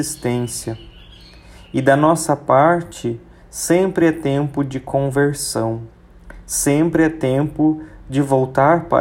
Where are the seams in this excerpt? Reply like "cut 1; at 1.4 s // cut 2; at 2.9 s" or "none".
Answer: none

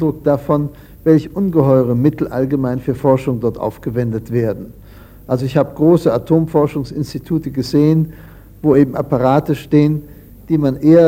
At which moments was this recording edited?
none

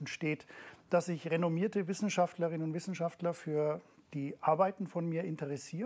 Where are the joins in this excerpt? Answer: none

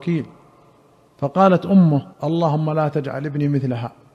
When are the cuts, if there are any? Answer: cut 1; at 2.1 s

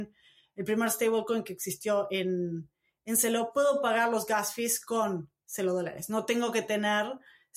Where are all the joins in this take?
none

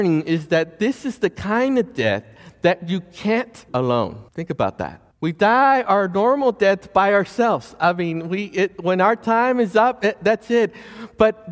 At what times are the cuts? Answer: cut 1; at 3.7 s // cut 2; at 4.3 s // cut 3; at 5.1 s

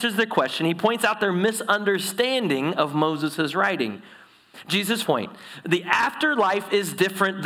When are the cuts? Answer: cut 1; at 5.0 s

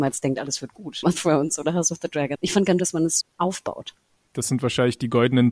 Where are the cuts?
cut 1; at 1.0 s // cut 2; at 2.3 s // cut 3; at 2.8 s // cut 4; at 3.2 s

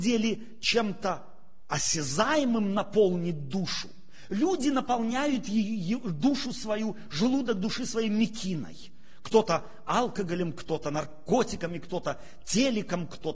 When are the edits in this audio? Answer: none

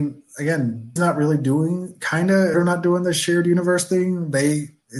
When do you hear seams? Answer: cut 1; at 1.0 s // cut 2; at 2.5 s

